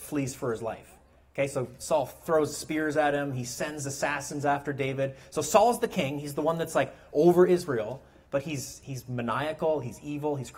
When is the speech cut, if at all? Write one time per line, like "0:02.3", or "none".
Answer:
none